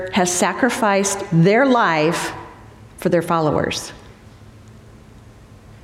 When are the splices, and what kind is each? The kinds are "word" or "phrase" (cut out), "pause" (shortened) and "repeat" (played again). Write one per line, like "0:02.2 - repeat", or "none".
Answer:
none